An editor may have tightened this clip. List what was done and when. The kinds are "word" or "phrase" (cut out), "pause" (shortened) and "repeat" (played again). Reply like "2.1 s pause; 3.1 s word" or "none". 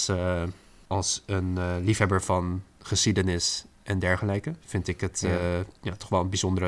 3.7 s pause; 4.6 s pause; 5.8 s pause